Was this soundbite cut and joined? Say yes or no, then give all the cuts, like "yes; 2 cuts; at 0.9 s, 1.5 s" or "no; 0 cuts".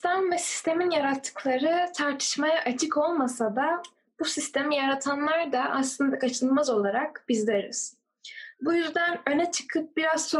no; 0 cuts